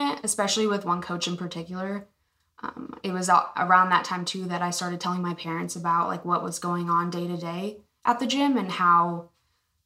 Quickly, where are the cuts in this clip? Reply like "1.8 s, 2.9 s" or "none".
none

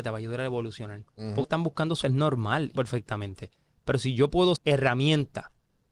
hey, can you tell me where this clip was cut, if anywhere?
1.1 s, 1.4 s, 2.0 s, 2.7 s, 4.6 s

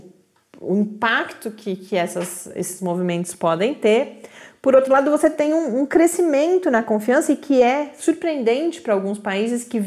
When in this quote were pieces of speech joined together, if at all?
none

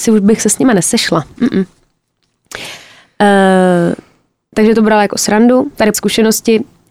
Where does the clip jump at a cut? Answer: 5.9 s

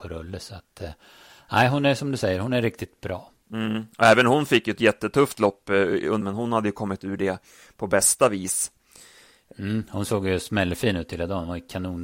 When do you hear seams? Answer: 6.2 s

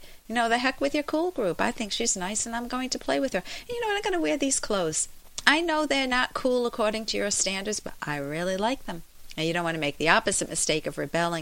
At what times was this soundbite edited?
none

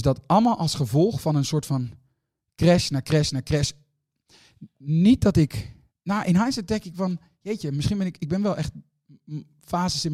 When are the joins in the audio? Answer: 5.9 s

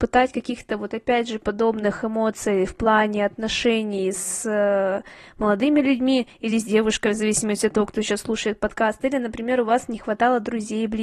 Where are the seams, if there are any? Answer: none

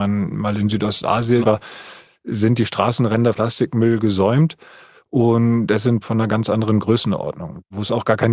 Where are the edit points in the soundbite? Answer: 1.4 s, 3.3 s, 6.0 s

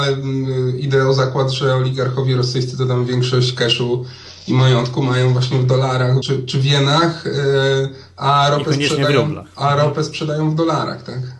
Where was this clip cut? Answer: 6.2 s

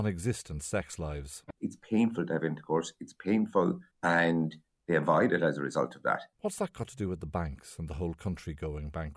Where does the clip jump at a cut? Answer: 3.9 s, 6.3 s

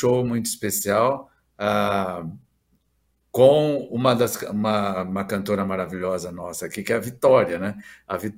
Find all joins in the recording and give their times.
none

